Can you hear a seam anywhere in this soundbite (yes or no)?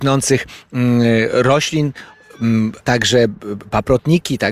yes